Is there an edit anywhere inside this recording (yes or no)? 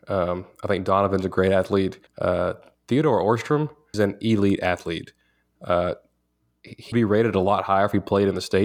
yes